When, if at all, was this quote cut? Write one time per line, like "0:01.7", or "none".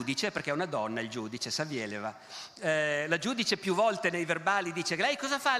none